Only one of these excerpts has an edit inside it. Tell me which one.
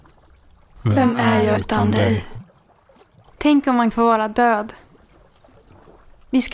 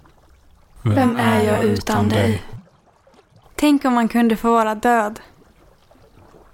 first; 2 cuts; at 1.6 s, 3.9 s

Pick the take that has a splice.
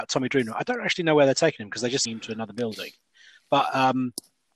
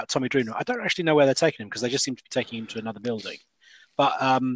first; 1 cut; at 2.1 s

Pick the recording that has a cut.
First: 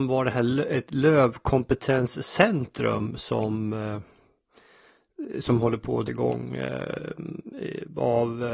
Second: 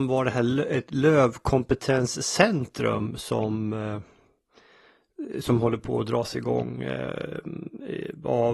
first; 1 cut; at 6.1 s

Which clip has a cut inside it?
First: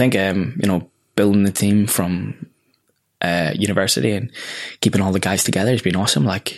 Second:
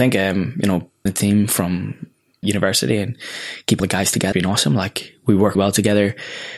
second; 5 cuts; at 1.1 s, 2.4 s, 3.8 s, 4.3 s, 5.5 s

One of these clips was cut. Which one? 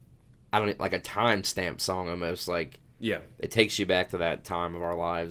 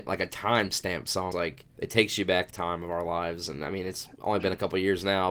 second; 3 cuts; at 1.3 s, 1.7 s, 2.5 s

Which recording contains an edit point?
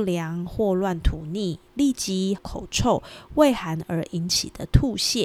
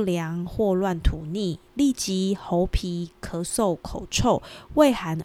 first; 1 cut; at 2.4 s

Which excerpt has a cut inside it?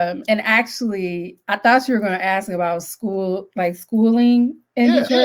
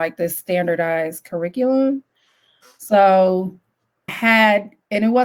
second; 1 cut; at 4.1 s

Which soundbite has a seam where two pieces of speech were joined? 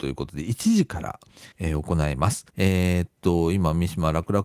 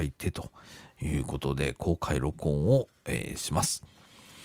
first; 2 cuts; at 1.5 s, 2.5 s

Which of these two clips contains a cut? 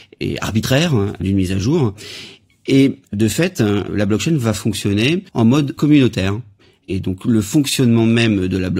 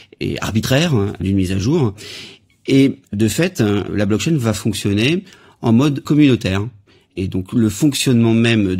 first; 1 cut; at 5.3 s

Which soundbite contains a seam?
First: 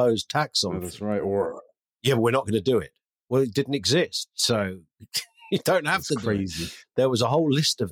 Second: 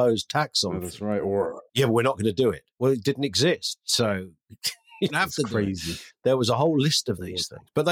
second; 3 cuts; at 1.7 s, 2.7 s, 5.1 s

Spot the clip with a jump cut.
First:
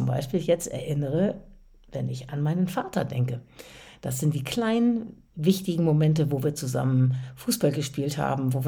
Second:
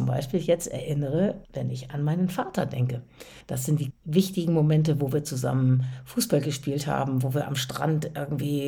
second; 3 cuts; at 1.4 s, 3.4 s, 3.9 s

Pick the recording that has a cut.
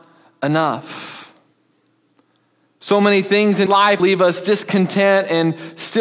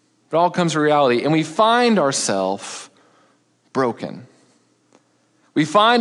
first; 2 cuts; at 3.7 s, 4.0 s

